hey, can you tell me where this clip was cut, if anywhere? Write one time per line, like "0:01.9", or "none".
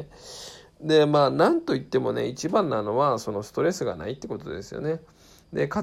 none